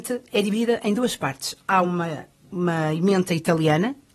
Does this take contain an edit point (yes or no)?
no